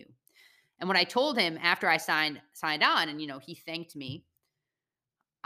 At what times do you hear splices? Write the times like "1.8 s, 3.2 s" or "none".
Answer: none